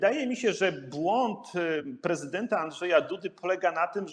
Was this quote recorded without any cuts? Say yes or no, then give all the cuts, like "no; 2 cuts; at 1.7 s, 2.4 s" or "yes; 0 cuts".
yes; 0 cuts